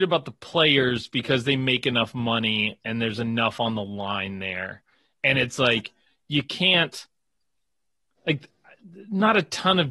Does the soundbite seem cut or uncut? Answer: uncut